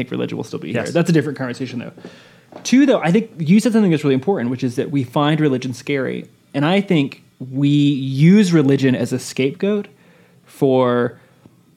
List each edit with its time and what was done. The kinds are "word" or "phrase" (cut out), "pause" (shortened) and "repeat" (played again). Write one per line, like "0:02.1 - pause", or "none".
0:07.3 - pause

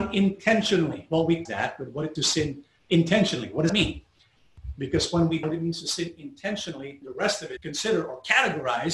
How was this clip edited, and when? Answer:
0:01.5 - word
0:02.2 - word
0:03.7 - word
0:05.4 - word
0:07.0 - word
0:07.6 - word

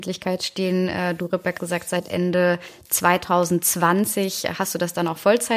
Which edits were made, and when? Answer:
0:01.6 - word

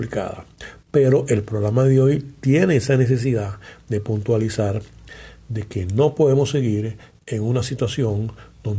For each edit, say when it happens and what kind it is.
none

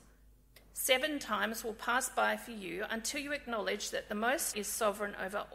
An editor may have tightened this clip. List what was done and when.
0:04.5 - word

